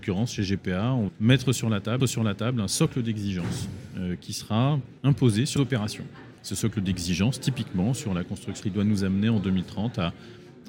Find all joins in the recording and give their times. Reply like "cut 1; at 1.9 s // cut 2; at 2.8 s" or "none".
cut 1; at 1.1 s // cut 2; at 2.0 s // cut 3; at 5.0 s // cut 4; at 5.6 s // cut 5; at 6.4 s // cut 6; at 8.6 s